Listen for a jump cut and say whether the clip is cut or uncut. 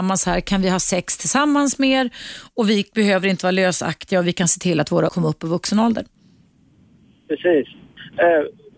cut